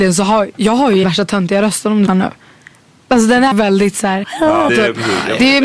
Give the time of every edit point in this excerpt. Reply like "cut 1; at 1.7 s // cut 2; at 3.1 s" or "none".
cut 1; at 1.0 s // cut 2; at 2.1 s // cut 3; at 3.5 s // cut 4; at 4.2 s // cut 5; at 4.7 s